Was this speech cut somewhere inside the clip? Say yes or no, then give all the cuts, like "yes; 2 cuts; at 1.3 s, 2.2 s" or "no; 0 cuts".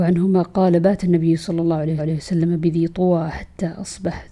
yes; 1 cut; at 2.0 s